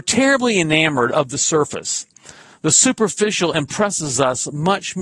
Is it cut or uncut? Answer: uncut